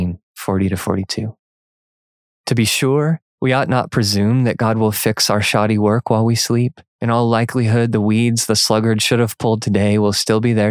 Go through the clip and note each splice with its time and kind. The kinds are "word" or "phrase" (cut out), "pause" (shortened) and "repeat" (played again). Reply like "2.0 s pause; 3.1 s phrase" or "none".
3.3 s pause; 6.9 s pause